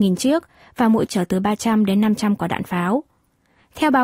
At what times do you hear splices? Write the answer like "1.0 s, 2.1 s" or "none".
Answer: 1.1 s